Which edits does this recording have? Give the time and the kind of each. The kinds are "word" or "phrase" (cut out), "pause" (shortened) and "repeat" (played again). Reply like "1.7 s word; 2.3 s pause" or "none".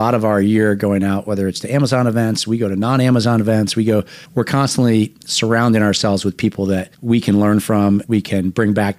4.2 s pause; 6.9 s pause; 8.0 s word